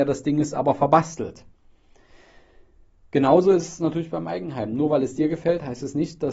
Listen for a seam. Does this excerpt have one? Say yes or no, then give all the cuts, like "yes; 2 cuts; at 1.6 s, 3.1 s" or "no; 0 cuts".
no; 0 cuts